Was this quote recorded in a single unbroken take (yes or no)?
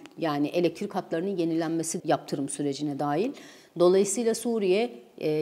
no